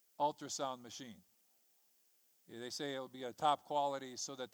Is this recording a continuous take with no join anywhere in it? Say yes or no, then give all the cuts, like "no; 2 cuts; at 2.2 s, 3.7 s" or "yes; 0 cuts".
yes; 0 cuts